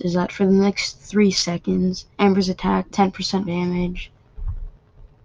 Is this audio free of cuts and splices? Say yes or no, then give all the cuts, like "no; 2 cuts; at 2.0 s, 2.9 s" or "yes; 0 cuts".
no; 3 cuts; at 2.1 s, 2.9 s, 3.4 s